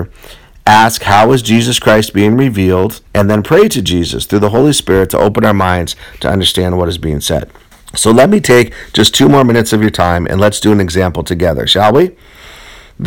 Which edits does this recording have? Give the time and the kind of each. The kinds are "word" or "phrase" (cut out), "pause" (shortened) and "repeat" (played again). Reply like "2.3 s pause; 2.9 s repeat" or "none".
3.1 s pause; 7.7 s pause